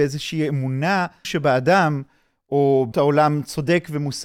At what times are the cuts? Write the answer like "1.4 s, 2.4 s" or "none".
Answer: 1.2 s, 2.9 s